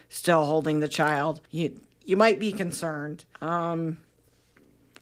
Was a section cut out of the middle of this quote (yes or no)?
yes